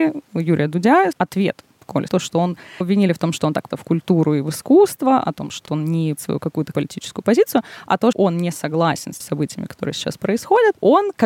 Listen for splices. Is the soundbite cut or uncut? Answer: cut